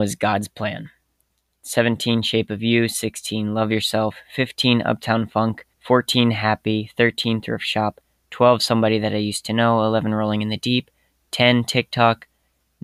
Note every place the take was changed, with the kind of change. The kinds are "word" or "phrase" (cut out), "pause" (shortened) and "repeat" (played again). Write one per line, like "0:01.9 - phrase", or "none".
0:05.7 - pause